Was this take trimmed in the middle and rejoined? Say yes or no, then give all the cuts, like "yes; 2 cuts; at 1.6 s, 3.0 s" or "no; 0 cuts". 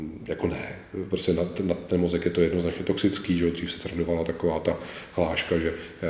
no; 0 cuts